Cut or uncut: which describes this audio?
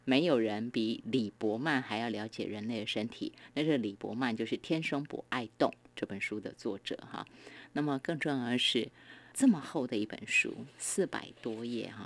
cut